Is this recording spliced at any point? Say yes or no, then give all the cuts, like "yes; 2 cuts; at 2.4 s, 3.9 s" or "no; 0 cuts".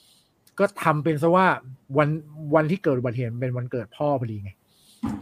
yes; 1 cut; at 1.8 s